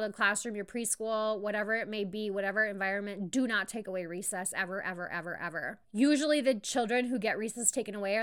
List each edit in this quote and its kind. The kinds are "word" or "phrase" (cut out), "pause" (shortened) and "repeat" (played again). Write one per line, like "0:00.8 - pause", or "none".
0:05.8 - pause